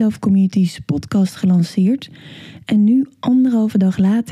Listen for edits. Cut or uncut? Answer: uncut